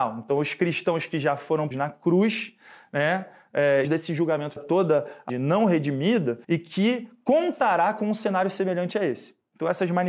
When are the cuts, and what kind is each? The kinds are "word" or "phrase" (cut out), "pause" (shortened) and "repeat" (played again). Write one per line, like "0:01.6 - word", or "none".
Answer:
0:01.7 - phrase
0:03.8 - phrase
0:04.6 - phrase
0:05.3 - word
0:06.4 - pause